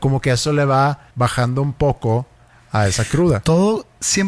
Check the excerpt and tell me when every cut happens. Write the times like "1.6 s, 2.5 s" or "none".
1.1 s